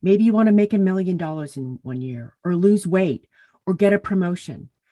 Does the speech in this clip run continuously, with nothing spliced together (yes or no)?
yes